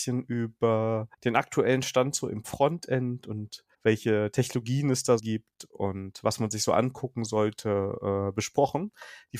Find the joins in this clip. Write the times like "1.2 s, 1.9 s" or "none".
1.1 s, 3.7 s, 5.2 s